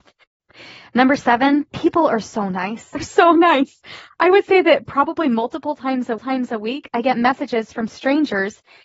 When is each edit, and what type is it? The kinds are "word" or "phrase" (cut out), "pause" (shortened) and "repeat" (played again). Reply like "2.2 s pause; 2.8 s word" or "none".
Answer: 1.7 s pause; 2.9 s phrase; 6.2 s repeat